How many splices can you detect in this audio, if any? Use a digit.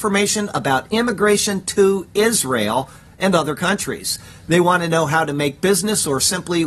0